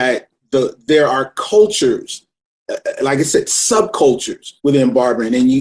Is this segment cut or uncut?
cut